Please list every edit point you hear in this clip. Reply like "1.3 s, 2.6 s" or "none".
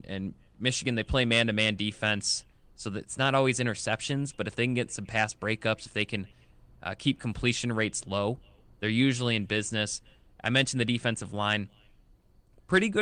none